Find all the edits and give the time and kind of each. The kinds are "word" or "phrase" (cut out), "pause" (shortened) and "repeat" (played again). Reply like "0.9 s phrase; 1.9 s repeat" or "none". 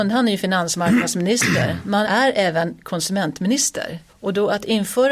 2.0 s word; 4.1 s pause